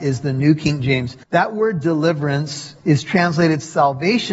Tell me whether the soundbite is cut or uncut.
cut